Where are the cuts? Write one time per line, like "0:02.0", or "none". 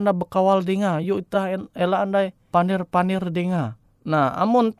none